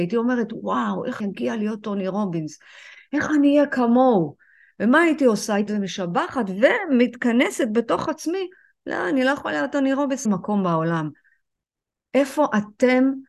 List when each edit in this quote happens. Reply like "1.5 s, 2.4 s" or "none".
1.2 s, 5.7 s, 10.2 s